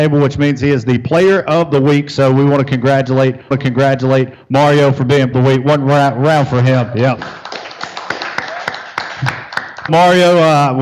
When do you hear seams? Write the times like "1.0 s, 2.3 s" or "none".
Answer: 3.5 s, 5.3 s, 9.9 s